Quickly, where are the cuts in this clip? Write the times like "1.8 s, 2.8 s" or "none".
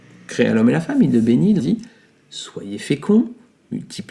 1.6 s